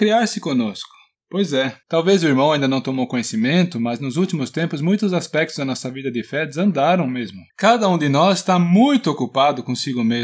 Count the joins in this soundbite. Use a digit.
3